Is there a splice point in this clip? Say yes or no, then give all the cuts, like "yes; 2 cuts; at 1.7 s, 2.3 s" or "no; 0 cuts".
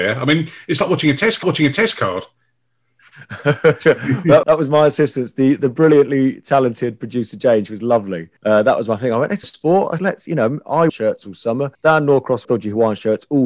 yes; 8 cuts; at 1.4 s, 4.4 s, 8.4 s, 9.4 s, 10.0 s, 10.9 s, 11.7 s, 12.4 s